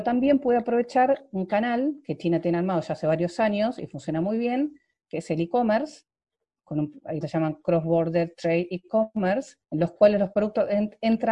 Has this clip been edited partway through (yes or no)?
yes